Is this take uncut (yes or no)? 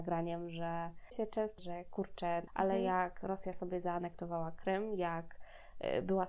no